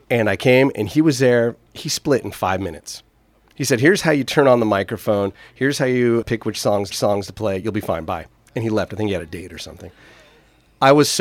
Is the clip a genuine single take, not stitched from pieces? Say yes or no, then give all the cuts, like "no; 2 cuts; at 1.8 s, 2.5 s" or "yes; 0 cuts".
no; 3 cuts; at 1.7 s, 6.2 s, 6.9 s